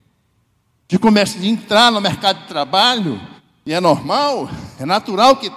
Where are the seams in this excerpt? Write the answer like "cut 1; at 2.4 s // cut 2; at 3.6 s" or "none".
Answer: none